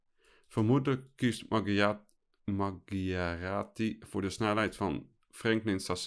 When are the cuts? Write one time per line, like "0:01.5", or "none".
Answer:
none